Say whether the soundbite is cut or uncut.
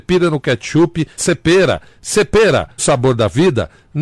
cut